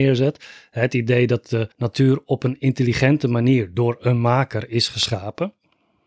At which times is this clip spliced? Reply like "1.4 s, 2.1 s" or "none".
1.7 s